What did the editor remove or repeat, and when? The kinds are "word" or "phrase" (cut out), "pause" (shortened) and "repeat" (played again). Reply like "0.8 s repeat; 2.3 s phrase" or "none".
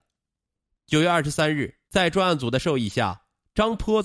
1.9 s pause